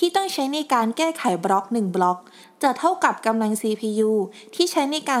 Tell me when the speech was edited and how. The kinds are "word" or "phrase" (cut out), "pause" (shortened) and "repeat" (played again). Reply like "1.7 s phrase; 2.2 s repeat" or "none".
none